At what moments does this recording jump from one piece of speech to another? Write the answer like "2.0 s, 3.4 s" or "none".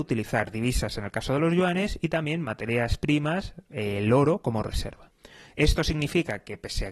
none